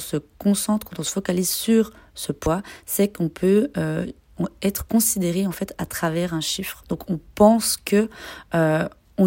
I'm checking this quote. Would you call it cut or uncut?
uncut